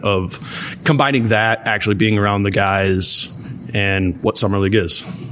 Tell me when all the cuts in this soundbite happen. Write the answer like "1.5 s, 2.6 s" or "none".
none